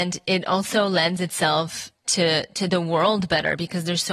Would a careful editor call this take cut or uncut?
uncut